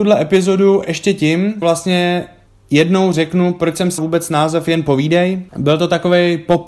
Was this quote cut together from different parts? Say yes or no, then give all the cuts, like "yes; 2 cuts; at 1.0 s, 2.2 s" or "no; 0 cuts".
yes; 3 cuts; at 1.6 s, 4.0 s, 5.5 s